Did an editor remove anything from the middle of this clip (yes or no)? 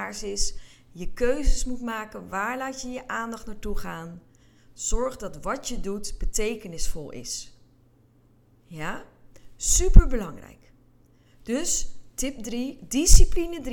no